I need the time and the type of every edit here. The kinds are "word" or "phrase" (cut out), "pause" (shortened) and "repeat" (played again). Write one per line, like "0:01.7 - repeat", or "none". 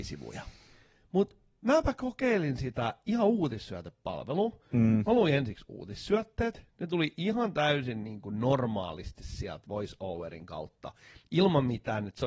none